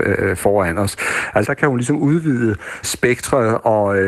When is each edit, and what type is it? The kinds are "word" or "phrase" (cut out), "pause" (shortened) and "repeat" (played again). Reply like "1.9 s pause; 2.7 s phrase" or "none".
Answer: 1.4 s word; 2.8 s word